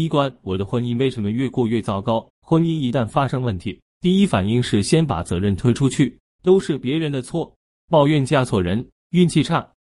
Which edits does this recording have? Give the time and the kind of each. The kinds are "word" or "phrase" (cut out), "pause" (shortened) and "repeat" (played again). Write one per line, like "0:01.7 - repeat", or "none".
0:02.3 - pause
0:07.8 - phrase